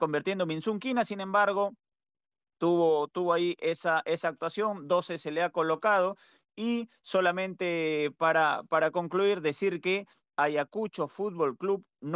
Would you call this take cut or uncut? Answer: uncut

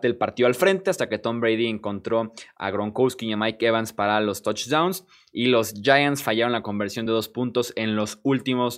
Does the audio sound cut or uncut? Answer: uncut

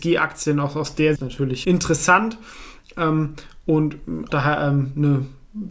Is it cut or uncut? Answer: cut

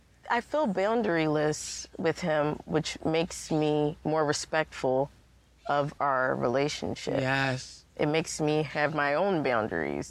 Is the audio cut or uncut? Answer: uncut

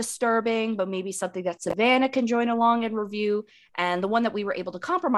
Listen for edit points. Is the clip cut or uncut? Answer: uncut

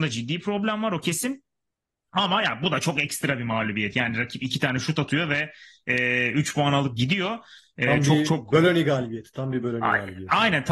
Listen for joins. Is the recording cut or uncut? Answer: uncut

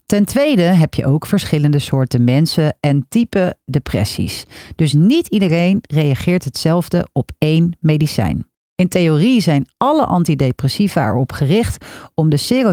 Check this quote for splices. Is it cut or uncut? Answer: cut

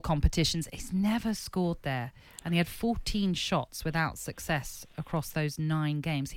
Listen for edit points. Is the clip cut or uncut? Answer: uncut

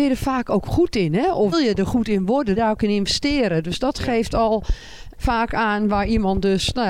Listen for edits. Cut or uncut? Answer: cut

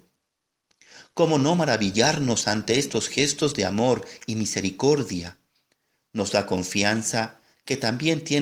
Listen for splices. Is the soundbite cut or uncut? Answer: uncut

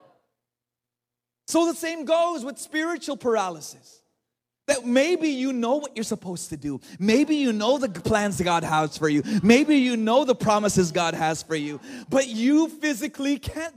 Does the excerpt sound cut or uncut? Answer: uncut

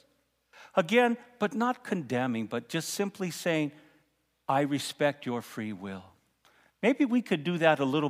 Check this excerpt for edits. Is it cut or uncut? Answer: uncut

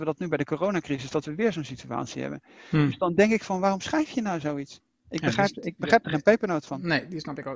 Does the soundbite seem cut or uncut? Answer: uncut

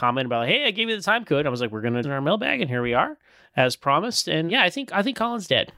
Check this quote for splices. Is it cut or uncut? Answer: cut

